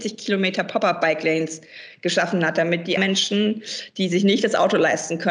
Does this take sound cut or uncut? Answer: cut